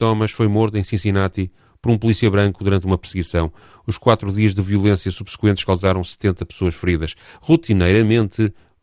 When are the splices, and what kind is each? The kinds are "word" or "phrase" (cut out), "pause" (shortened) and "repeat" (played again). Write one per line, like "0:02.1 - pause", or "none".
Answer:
none

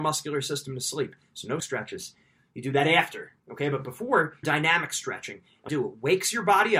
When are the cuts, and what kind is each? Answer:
0:01.6 - word
0:03.4 - pause
0:04.4 - phrase
0:05.7 - phrase

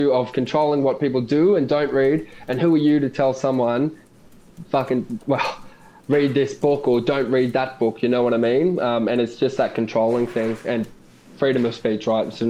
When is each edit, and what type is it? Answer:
none

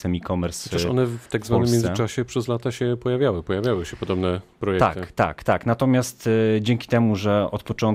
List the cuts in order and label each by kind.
none

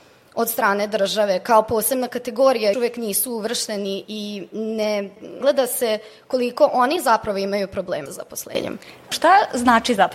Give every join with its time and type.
0:02.7 - word
0:04.0 - word
0:05.4 - word
0:08.1 - word

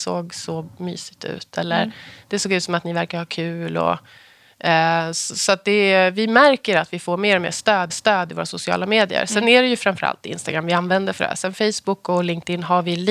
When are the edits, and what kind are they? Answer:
0:07.9 - repeat

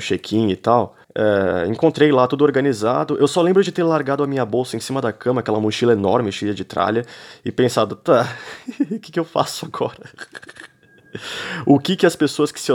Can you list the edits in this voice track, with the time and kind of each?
0:01.0 - pause

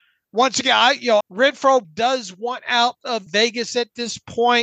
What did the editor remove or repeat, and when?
0:01.2 - word
0:01.8 - word
0:03.3 - word

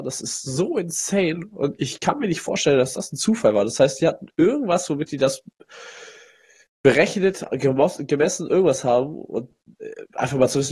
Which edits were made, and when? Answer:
none

